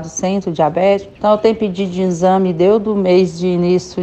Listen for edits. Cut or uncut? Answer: cut